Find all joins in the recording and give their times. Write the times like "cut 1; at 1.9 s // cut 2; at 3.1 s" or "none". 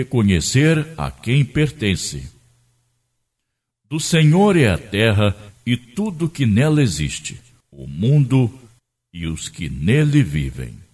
none